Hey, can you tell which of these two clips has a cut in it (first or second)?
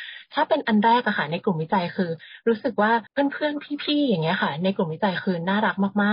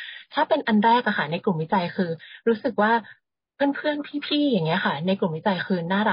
first